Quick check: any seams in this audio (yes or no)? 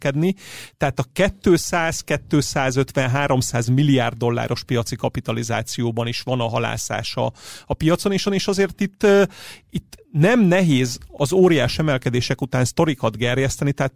yes